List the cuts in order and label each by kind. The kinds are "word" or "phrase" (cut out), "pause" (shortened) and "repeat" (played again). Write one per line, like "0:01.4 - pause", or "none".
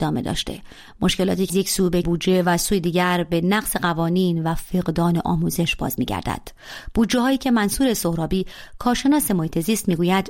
0:01.5 - word
0:02.0 - word